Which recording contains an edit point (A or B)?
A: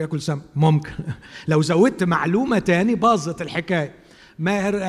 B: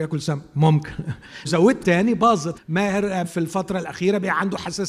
B